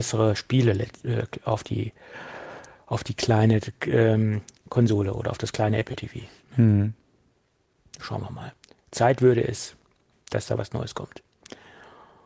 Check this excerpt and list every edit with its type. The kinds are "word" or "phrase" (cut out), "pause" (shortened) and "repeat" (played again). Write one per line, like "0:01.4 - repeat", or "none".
none